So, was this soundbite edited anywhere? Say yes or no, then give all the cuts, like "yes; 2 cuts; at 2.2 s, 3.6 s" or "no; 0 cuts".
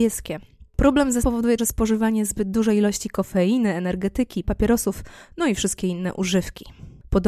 yes; 3 cuts; at 1.2 s, 1.6 s, 4.4 s